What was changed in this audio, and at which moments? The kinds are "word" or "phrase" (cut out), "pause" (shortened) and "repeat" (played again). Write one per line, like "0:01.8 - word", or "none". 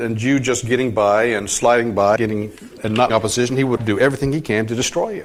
0:02.2 - word
0:02.8 - word
0:03.1 - word
0:03.8 - word